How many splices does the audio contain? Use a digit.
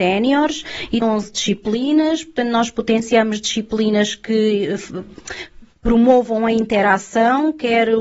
1